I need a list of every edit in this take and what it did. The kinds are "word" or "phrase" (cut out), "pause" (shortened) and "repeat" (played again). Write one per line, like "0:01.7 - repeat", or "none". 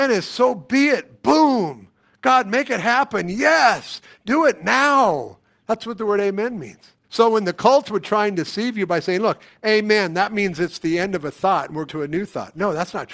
0:07.0 - pause
0:11.9 - word